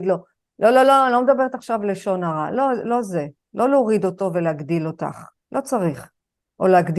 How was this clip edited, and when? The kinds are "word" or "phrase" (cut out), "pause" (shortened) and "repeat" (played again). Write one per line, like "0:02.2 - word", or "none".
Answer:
none